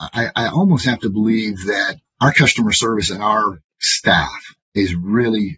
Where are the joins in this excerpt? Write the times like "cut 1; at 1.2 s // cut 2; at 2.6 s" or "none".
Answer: cut 1; at 2.1 s // cut 2; at 3.7 s